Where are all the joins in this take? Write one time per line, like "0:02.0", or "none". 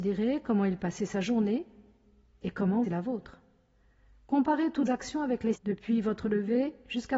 0:02.8
0:04.9
0:05.5